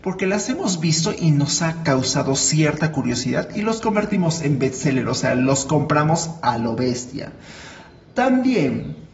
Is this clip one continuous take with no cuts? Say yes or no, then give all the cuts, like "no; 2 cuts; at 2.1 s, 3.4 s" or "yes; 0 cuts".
yes; 0 cuts